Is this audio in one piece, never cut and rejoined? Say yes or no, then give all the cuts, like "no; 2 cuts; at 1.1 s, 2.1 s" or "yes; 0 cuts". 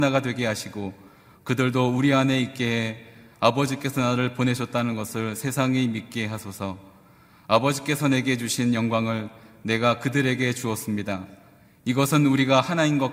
yes; 0 cuts